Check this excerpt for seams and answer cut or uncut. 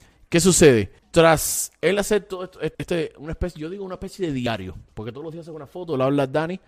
cut